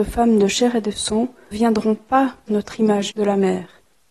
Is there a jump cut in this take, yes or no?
yes